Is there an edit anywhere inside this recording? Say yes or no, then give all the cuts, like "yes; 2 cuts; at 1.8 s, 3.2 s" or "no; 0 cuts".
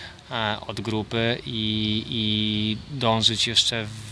no; 0 cuts